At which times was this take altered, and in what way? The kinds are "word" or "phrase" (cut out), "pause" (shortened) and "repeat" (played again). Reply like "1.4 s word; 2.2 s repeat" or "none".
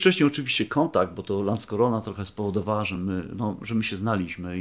none